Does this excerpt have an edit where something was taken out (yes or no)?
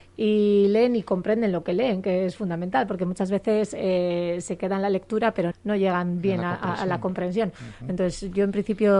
yes